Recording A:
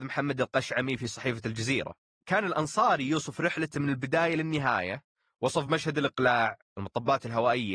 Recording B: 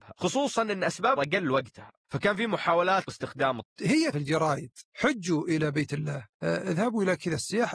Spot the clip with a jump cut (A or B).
B